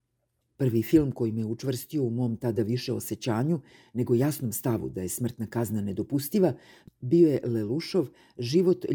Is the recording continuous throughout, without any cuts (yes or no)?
yes